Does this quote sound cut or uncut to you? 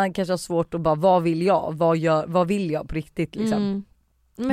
uncut